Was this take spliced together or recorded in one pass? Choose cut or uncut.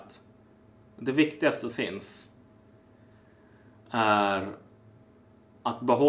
cut